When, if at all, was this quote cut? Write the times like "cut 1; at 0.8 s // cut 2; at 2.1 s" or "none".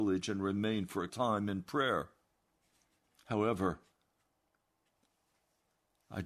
cut 1; at 1.1 s